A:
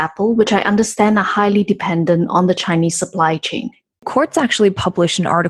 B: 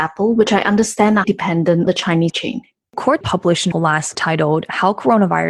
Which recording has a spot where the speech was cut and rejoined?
B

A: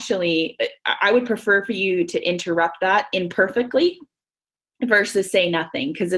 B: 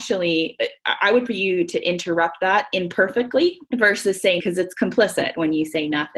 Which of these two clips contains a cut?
B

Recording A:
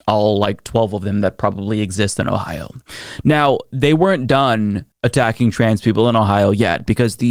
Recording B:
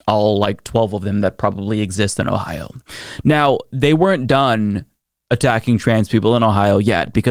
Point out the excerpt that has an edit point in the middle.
A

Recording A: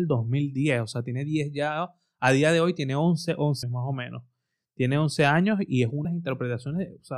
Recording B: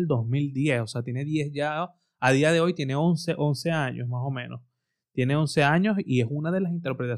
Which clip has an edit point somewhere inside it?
A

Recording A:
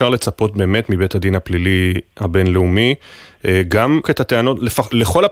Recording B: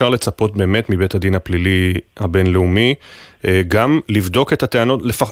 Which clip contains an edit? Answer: A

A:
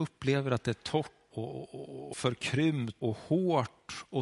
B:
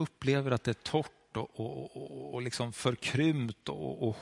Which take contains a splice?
A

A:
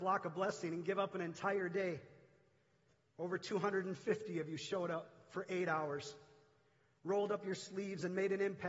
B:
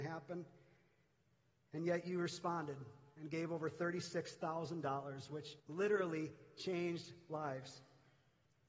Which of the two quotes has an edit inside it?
B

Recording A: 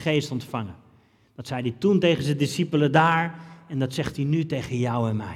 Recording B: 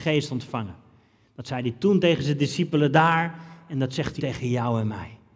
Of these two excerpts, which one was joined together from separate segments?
B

